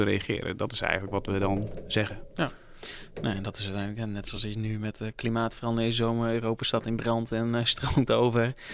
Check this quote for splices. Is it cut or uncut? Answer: uncut